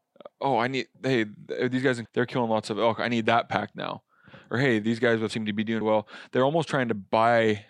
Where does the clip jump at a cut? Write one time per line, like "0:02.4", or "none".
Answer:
0:00.9
0:02.1
0:05.3
0:05.8